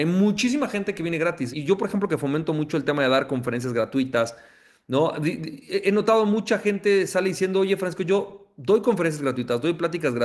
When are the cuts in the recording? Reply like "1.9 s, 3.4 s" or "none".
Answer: 1.5 s